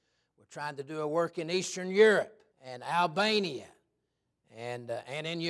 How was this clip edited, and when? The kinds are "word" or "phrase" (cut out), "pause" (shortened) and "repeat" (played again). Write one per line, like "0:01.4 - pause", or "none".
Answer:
0:02.5 - pause